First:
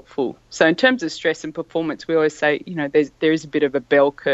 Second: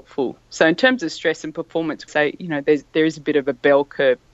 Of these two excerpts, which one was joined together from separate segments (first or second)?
second